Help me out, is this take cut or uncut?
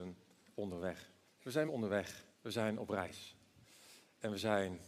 cut